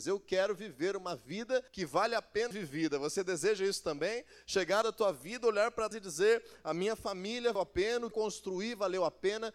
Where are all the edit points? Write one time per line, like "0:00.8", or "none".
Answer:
0:01.7
0:02.5
0:04.8
0:05.9
0:07.6
0:08.1